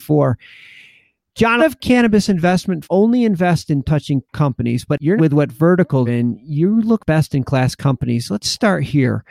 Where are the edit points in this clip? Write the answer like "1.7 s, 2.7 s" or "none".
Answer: 1.6 s, 2.8 s, 3.8 s, 4.3 s, 5.2 s, 6.1 s, 7.0 s